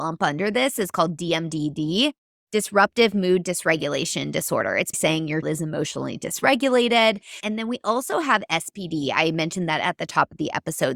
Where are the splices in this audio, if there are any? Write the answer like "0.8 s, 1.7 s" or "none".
4.9 s, 5.4 s